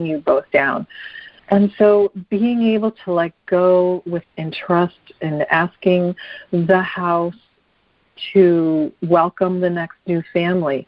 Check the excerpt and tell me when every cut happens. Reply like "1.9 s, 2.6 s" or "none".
1.4 s, 4.2 s